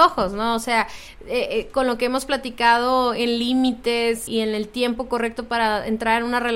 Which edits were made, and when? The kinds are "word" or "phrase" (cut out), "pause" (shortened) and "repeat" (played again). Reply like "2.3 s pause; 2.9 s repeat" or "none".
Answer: 4.3 s word